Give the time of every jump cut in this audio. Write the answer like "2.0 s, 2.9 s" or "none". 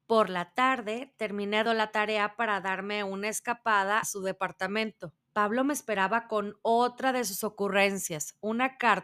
1.7 s, 4.0 s, 5.2 s